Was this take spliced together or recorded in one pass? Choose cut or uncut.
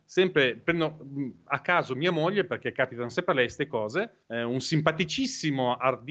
cut